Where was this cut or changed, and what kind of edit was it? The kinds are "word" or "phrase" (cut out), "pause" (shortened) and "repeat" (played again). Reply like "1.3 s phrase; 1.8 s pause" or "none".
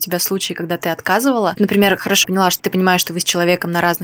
1.6 s word; 2.2 s word; 2.6 s word